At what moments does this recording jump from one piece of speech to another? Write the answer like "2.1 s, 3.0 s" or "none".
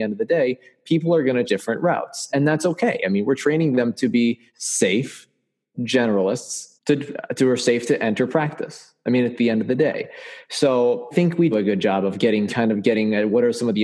1.5 s, 2.3 s, 4.5 s, 6.8 s, 11.1 s, 11.5 s, 12.5 s